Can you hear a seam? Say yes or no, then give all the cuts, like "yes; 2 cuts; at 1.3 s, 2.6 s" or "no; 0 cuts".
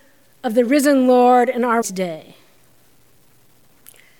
yes; 1 cut; at 1.8 s